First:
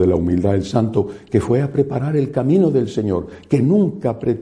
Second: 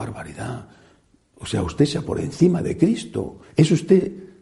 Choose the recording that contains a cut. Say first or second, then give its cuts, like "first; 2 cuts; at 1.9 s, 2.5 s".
second; 2 cuts; at 2.1 s, 3.4 s